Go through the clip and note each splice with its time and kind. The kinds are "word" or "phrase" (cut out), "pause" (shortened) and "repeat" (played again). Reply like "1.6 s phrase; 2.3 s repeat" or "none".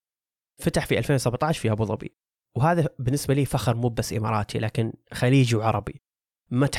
2.3 s pause